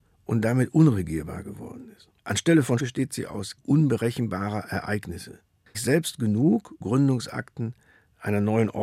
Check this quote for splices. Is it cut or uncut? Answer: cut